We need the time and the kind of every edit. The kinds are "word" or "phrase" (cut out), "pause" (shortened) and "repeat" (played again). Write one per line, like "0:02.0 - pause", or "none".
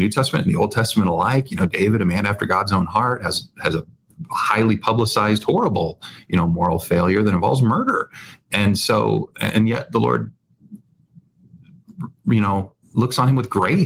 none